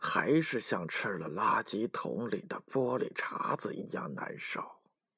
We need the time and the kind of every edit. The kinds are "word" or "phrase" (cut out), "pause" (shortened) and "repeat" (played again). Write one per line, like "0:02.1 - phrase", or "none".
none